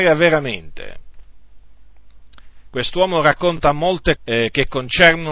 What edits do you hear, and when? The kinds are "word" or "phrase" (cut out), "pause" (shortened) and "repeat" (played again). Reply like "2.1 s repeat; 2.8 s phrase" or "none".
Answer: 4.2 s word